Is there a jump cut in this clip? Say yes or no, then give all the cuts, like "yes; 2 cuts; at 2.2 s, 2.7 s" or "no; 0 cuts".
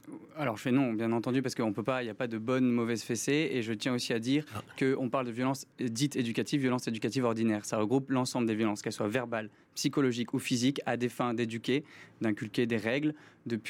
no; 0 cuts